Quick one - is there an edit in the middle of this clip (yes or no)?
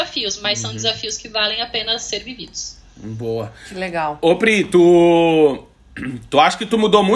no